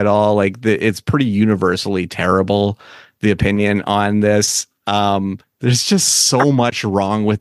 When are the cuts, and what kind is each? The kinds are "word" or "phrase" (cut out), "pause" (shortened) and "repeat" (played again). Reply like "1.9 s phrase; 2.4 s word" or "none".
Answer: 5.4 s pause

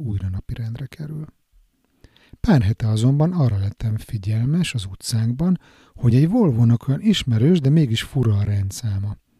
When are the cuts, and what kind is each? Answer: none

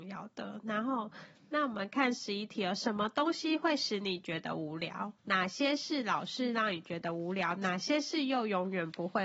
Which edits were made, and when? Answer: 5.2 s pause

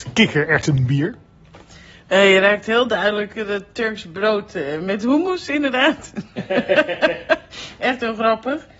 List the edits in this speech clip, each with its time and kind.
none

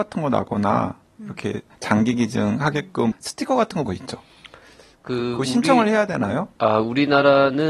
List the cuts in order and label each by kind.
1.8 s word; 3.1 s word; 3.9 s word

